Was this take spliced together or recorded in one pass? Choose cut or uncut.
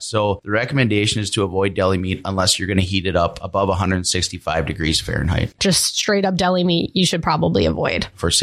uncut